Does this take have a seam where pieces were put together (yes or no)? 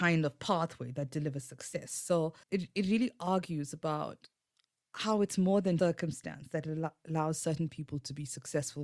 yes